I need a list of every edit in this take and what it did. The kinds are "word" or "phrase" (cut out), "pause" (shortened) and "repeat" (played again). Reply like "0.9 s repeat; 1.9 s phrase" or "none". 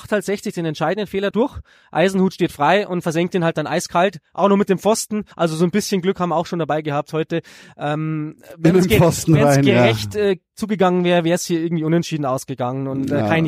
1.3 s phrase; 5.3 s pause

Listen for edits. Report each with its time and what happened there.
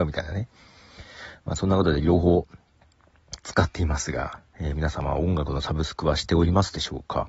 4.5 s pause

